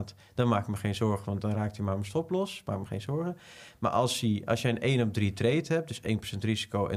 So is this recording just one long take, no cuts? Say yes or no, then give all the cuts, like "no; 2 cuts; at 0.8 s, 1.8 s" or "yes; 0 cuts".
yes; 0 cuts